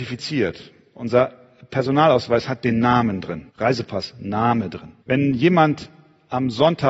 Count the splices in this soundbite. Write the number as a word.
two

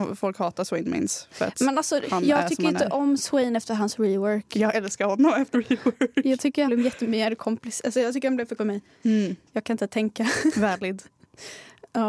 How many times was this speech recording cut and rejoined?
three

